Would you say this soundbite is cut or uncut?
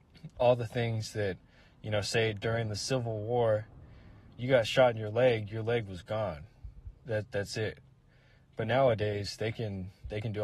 uncut